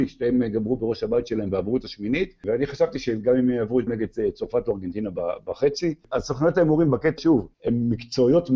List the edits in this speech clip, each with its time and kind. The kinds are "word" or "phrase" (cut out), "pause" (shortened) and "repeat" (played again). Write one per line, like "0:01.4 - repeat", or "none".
0:03.9 - phrase
0:07.2 - word
0:07.5 - pause